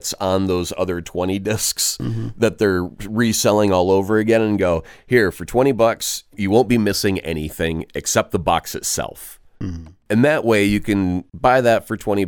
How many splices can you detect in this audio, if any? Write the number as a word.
zero